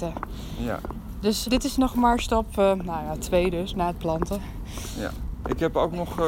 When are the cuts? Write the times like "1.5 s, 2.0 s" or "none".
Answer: 1.4 s